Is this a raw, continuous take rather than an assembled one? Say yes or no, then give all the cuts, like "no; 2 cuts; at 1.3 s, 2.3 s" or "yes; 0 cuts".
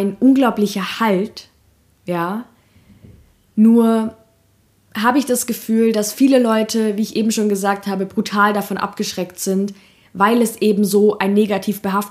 yes; 0 cuts